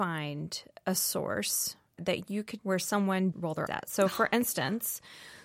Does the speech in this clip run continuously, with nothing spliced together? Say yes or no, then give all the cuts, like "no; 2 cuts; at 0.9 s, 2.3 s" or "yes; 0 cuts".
no; 4 cuts; at 2.0 s, 2.6 s, 3.3 s, 3.7 s